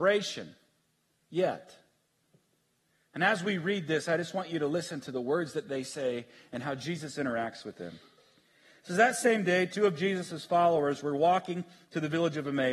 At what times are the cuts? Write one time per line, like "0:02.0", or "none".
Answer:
none